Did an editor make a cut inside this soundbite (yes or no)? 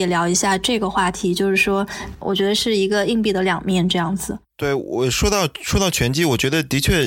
yes